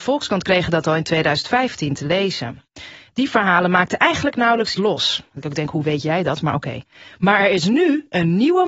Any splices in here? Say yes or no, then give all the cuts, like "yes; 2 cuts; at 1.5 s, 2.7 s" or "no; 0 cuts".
yes; 1 cut; at 4.8 s